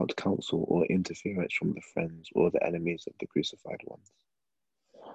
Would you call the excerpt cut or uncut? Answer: uncut